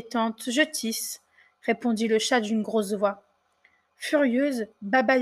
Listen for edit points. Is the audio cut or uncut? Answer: uncut